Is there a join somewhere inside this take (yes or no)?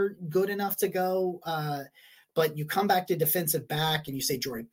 no